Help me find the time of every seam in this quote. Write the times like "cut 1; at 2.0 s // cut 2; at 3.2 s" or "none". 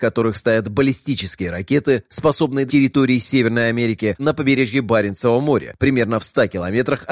cut 1; at 2.7 s // cut 2; at 4.2 s